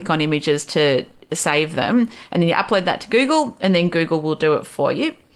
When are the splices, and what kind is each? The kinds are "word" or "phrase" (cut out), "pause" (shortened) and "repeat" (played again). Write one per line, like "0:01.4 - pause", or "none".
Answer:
none